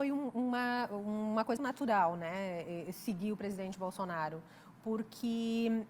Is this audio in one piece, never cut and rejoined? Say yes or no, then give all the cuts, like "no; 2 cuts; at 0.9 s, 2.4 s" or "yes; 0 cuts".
no; 1 cut; at 1.6 s